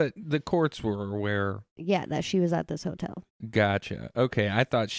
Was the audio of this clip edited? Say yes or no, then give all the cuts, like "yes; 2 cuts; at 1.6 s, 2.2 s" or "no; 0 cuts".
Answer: no; 0 cuts